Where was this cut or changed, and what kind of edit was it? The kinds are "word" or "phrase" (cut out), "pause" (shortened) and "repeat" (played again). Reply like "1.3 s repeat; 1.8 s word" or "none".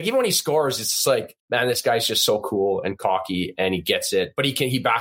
1.4 s pause